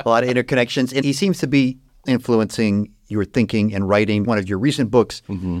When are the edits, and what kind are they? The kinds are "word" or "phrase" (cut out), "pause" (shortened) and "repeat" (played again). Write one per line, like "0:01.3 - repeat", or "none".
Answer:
0:01.0 - word
0:02.0 - word
0:04.2 - word